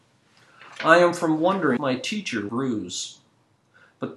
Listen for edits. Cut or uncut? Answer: cut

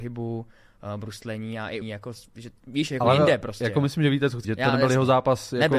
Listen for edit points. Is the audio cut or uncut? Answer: cut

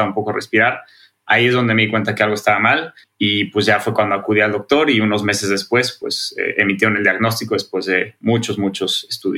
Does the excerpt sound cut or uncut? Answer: cut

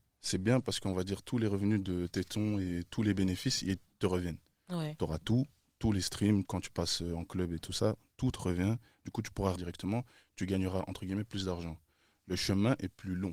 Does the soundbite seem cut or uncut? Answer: cut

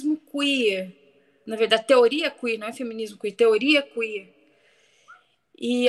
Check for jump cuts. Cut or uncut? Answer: uncut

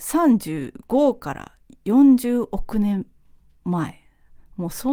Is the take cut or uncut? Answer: uncut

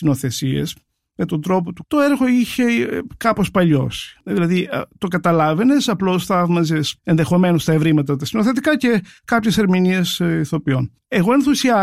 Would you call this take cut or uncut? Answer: cut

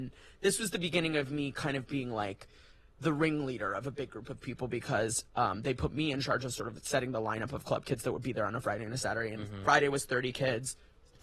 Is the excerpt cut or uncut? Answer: uncut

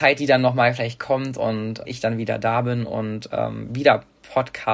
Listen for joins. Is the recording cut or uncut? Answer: cut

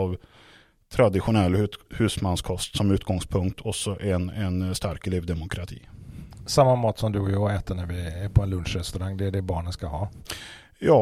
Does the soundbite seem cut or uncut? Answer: uncut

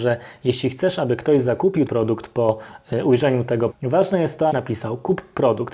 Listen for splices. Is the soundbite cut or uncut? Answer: cut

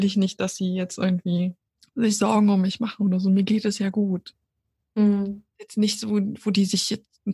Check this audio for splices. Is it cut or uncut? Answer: cut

